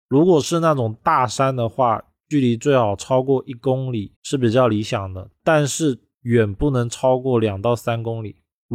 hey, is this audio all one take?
no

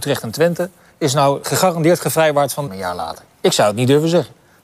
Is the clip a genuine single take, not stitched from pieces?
no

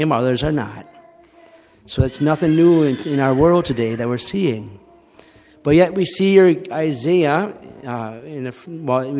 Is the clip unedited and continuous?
yes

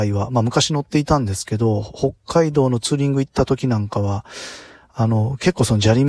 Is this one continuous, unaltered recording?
yes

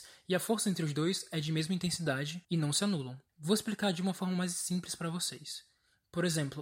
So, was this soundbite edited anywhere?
yes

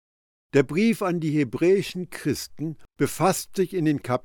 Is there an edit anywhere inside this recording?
no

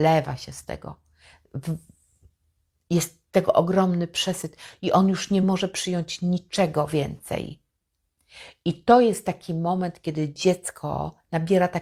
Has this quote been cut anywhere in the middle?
no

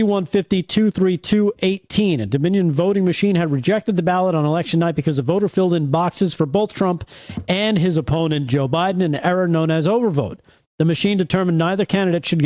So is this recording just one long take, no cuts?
yes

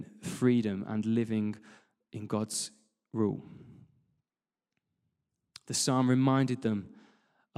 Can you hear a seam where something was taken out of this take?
no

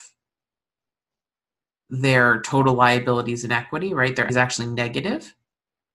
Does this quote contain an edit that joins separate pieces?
yes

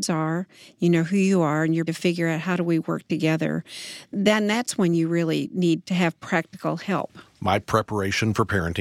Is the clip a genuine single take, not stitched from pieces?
no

